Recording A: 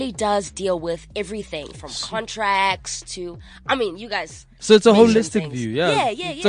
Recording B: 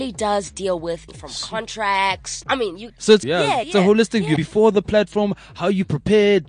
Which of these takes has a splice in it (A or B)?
B